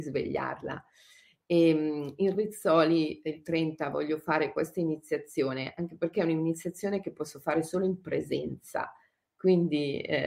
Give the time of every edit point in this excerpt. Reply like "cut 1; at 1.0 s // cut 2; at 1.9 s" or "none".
none